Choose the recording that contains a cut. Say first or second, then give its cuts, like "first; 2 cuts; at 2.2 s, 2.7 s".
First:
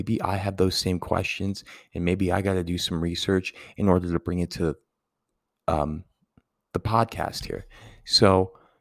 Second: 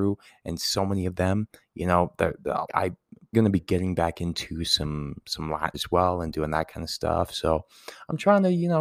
second; 3 cuts; at 2.7 s, 3.3 s, 5.7 s